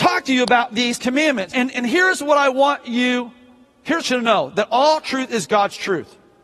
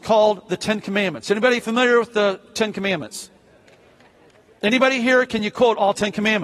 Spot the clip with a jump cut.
first; 3 cuts; at 1.0 s, 1.5 s, 4.0 s

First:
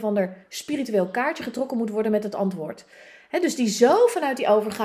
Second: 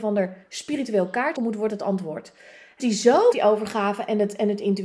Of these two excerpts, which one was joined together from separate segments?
second; 4 cuts; at 1.4 s, 1.7 s, 2.8 s, 3.3 s

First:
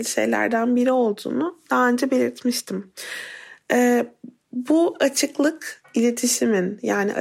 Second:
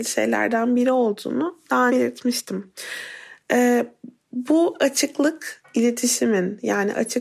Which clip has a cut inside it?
second; 1 cut; at 1.9 s

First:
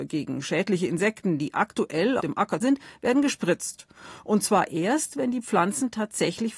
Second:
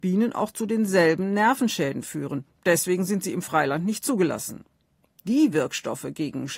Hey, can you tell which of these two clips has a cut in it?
first; 2 cuts; at 2.2 s, 2.6 s

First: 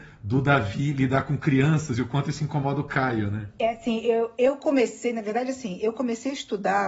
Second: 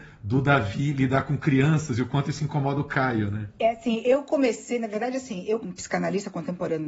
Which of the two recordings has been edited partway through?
second; 2 cuts; at 4.0 s, 5.6 s

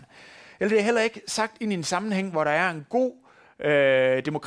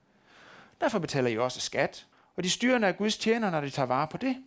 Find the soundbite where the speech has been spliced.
second; 1 cut; at 2.1 s

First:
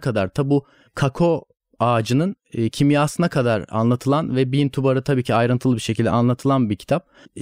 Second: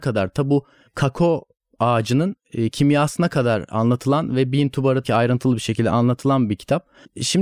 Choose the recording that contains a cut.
second; 1 cut; at 5.0 s

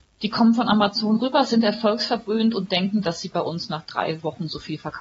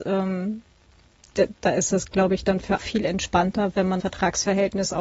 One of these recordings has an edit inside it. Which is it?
second; 2 cuts; at 2.8 s, 4.0 s

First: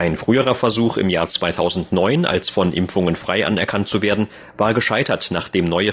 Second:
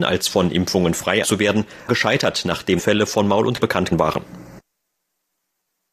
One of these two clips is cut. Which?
second; 5 cuts; at 1.2 s, 1.9 s, 2.8 s, 3.6 s, 3.9 s

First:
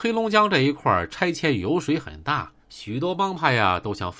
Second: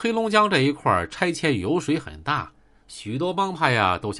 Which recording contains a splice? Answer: first; 1 cut; at 2.6 s

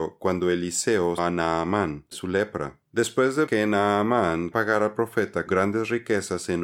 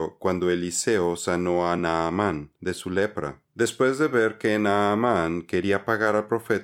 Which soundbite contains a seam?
first; 5 cuts; at 1.2 s, 2.1 s, 3.5 s, 4.5 s, 5.5 s

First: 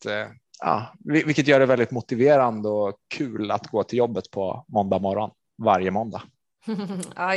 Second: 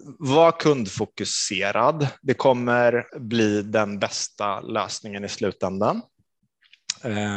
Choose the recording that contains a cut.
second; 1 cut; at 3.1 s

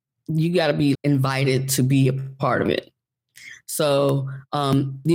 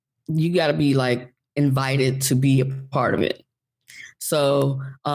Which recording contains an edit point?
first; 1 cut; at 0.9 s

